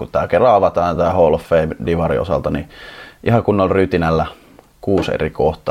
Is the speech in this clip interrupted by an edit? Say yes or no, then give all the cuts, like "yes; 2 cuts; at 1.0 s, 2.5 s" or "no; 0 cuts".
no; 0 cuts